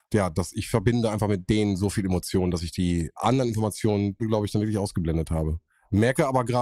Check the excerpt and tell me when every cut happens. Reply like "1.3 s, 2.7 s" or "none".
4.2 s